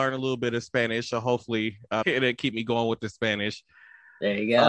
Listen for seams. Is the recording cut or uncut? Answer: cut